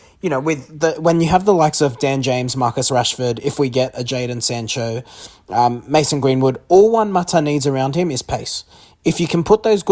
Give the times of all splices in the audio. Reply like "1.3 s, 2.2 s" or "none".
none